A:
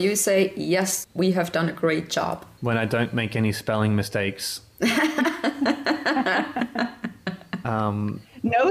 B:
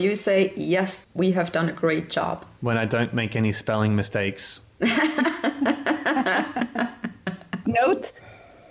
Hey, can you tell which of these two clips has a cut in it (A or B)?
B